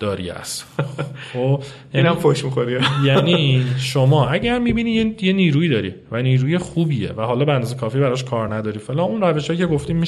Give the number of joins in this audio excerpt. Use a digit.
0